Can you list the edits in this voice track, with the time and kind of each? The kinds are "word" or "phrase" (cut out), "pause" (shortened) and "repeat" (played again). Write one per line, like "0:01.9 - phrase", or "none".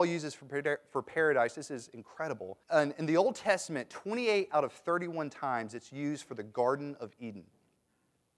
0:02.6 - pause

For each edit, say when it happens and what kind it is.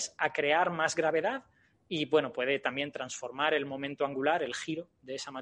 none

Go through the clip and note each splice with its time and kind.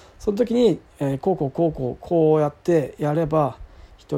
0:02.6 - pause

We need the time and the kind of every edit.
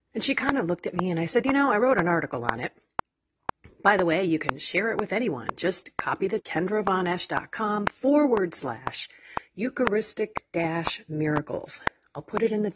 0:06.4 - word

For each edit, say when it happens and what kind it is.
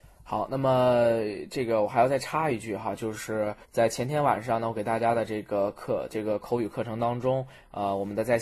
0:03.6 - pause

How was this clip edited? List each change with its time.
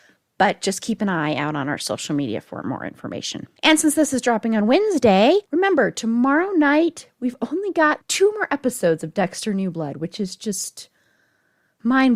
0:03.6 - pause
0:05.4 - pause
0:08.0 - word

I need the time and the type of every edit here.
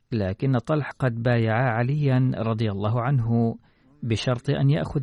0:00.9 - word

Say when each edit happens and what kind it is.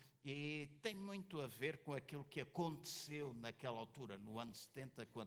none

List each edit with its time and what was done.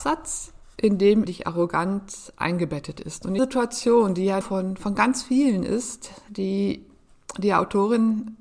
0:01.3 - phrase
0:03.4 - phrase
0:04.4 - phrase

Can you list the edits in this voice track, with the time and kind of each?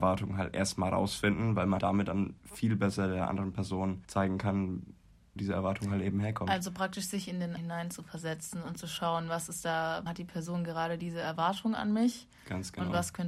0:01.8 - word
0:02.4 - pause
0:04.0 - pause
0:05.4 - word
0:07.6 - word
0:10.1 - word

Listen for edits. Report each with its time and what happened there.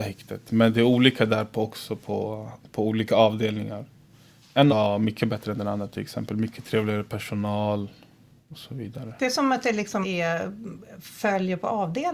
0:04.7 - word
0:10.0 - word

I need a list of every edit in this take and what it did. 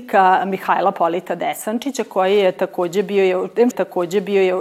0:03.7 - repeat

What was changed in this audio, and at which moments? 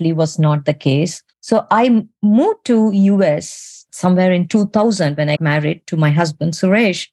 0:01.3 - pause
0:03.9 - word
0:05.4 - word

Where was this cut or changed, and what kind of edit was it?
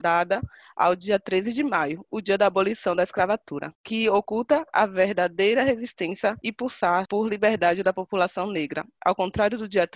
none

